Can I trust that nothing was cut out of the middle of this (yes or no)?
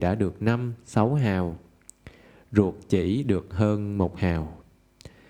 yes